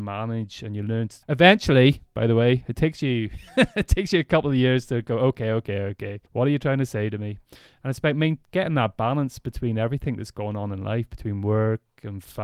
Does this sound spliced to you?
yes; 2 cuts; at 1.2 s, 6.3 s

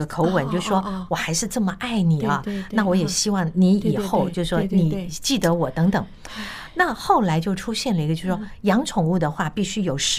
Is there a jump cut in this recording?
no; 0 cuts

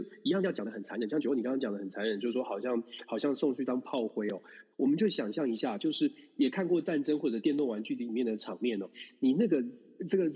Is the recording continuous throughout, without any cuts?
no; 1 cut; at 4.7 s

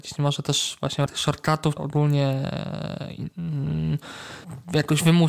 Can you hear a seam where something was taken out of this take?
yes; 2 cuts; at 1.1 s, 1.8 s

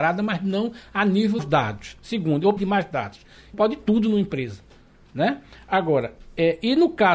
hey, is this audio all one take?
no; 3 cuts; at 1.4 s, 2.6 s, 3.5 s

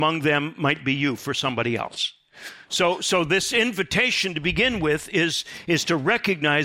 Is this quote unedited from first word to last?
yes; 0 cuts

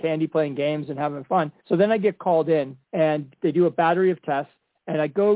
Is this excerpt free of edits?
no; 2 cuts; at 1.6 s, 2.8 s

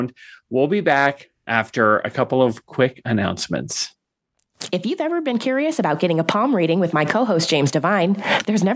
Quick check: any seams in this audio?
no; 0 cuts

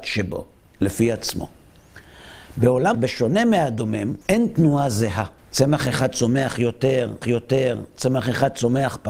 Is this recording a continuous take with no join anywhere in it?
no; 4 cuts; at 2.9 s, 4.2 s, 5.4 s, 7.2 s

